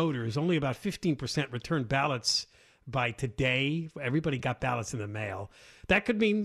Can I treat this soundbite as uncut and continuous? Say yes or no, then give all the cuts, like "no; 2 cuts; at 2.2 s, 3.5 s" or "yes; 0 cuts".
yes; 0 cuts